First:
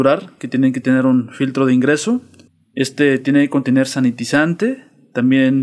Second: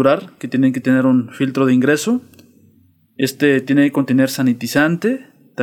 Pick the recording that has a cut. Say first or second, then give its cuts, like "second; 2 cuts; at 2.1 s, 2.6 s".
first; 1 cut; at 2.5 s